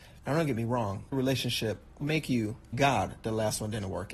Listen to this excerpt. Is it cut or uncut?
cut